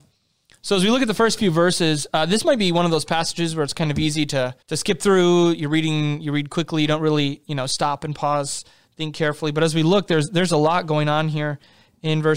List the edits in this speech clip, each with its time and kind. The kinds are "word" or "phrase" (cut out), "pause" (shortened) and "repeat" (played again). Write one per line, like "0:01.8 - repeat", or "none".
0:04.6 - pause